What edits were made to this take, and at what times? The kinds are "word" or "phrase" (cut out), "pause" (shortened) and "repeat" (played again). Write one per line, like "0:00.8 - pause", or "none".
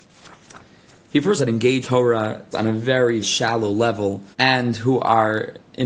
0:01.4 - phrase
0:01.8 - word
0:02.5 - word
0:03.2 - word
0:04.3 - pause